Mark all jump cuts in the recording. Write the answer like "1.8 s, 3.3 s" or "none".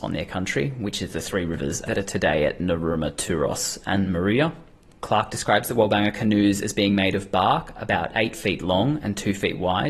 none